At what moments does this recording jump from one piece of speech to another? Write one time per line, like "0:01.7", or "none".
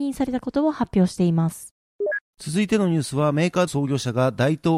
0:03.7